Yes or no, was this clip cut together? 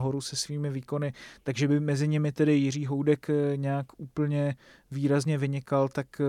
no